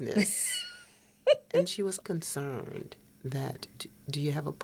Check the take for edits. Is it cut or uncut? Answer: cut